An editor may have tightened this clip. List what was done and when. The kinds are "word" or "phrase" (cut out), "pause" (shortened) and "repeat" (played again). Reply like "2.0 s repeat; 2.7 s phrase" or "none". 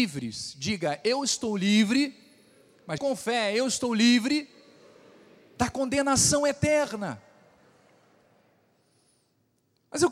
3.0 s word